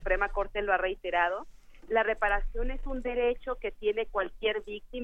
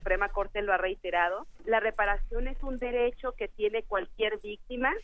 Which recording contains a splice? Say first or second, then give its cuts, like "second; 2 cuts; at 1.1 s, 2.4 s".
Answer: second; 1 cut; at 1.6 s